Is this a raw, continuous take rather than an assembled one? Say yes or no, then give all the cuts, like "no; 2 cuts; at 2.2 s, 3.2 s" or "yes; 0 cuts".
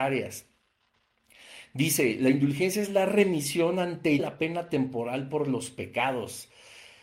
no; 1 cut; at 4.2 s